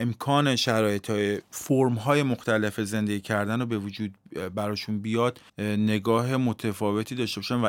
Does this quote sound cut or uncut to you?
cut